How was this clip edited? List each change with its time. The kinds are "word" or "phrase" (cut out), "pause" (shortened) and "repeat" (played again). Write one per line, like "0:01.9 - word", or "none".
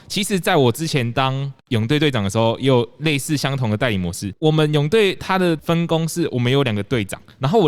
0:01.6 - pause

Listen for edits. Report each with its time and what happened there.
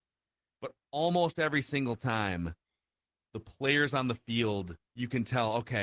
none

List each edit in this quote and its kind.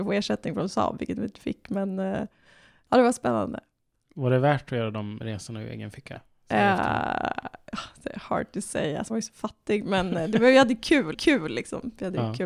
0:09.1 - word
0:11.1 - repeat

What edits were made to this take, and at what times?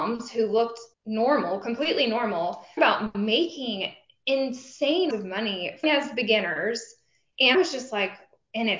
0:00.9 - pause
0:02.8 - word
0:05.1 - word
0:05.8 - phrase
0:07.5 - word

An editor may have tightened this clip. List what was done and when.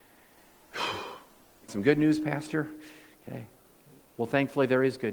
0:01.7 - word

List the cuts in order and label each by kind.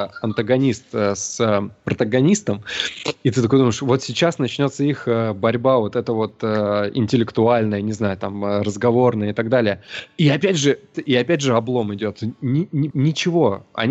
0:10.9 - word
0:12.9 - word

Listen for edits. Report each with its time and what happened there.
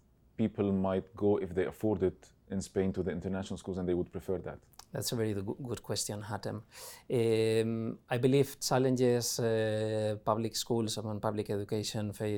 none

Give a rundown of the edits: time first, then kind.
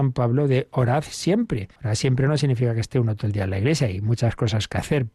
0:01.8 - pause

